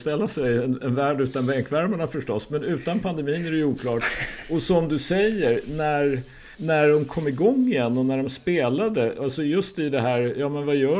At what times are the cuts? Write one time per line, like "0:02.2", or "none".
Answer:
0:06.5